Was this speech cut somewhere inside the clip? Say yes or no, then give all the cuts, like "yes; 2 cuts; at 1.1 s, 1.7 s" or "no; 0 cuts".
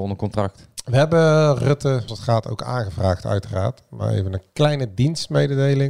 yes; 1 cut; at 2.1 s